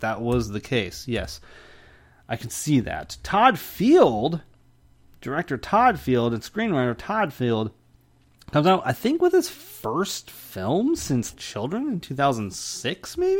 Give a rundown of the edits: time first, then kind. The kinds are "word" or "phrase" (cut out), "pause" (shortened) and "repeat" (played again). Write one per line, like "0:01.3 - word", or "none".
0:11.3 - word